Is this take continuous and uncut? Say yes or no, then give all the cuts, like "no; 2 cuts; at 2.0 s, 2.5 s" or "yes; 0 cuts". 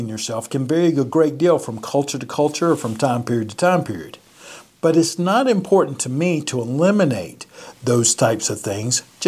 yes; 0 cuts